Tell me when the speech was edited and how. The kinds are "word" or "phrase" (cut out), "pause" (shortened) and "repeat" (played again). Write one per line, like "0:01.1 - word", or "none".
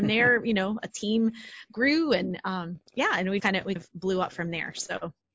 0:02.9 - pause
0:03.4 - word
0:03.8 - word